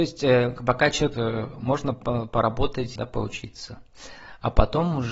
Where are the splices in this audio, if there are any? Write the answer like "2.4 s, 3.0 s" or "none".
1.1 s, 3.0 s